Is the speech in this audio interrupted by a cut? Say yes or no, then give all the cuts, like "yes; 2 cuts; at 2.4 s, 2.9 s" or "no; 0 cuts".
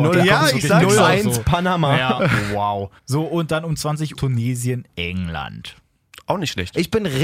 yes; 2 cuts; at 3.0 s, 4.2 s